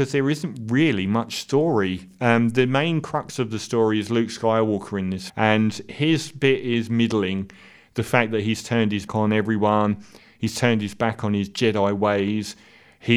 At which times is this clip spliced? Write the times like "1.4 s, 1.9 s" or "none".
5.3 s, 9.1 s